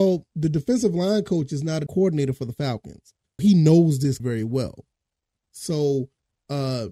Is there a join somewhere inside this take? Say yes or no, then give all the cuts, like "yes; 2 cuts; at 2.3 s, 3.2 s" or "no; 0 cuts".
yes; 3 cuts; at 1.9 s, 3.4 s, 4.2 s